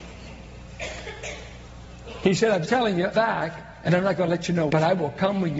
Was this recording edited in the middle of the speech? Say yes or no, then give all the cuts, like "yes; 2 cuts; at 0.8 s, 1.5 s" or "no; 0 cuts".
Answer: yes; 3 cuts; at 2.6 s, 3.1 s, 4.7 s